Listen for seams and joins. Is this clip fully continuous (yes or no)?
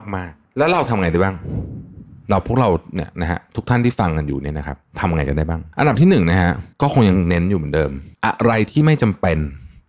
no